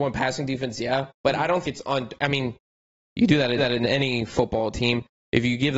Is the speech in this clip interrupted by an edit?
yes; 2 cuts; at 1.6 s, 3.6 s

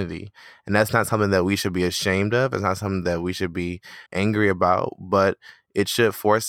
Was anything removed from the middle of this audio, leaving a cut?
yes; 1 cut; at 4.1 s

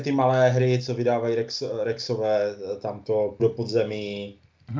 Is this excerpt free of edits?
no; 1 cut; at 3.4 s

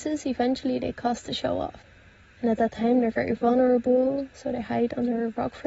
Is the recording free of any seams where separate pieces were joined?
yes; 0 cuts

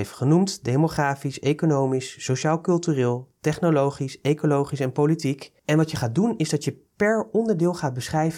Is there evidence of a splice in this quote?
no; 0 cuts

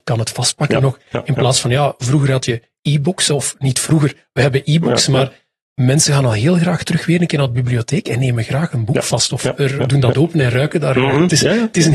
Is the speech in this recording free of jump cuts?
yes; 0 cuts

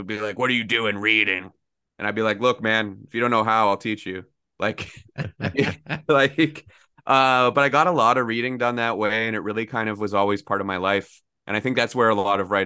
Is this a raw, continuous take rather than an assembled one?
yes; 0 cuts

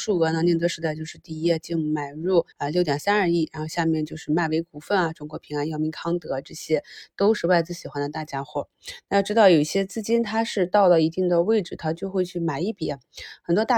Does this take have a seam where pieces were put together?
yes; 1 cut; at 2.5 s

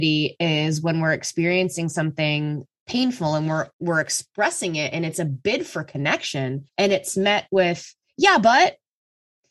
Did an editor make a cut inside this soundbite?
yes; 2 cuts; at 3.7 s, 6.7 s

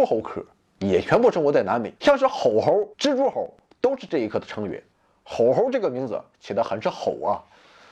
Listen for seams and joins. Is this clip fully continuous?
no; 3 cuts; at 2.0 s, 2.9 s, 4.9 s

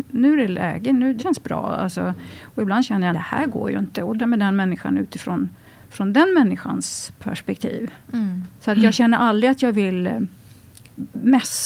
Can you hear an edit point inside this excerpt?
yes; 3 cuts; at 1.2 s, 3.1 s, 4.2 s

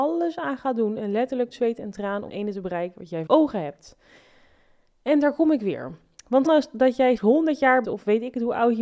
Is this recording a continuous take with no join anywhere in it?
no; 6 cuts; at 1.5 s, 2.3 s, 3.3 s, 6.4 s, 7.2 s, 7.8 s

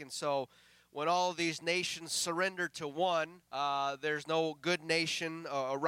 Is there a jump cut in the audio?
yes; 1 cut; at 3.4 s

